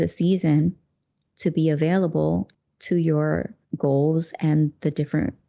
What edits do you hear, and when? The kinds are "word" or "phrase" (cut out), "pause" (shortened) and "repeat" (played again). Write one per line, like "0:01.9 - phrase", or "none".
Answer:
0:02.5 - pause
0:03.6 - pause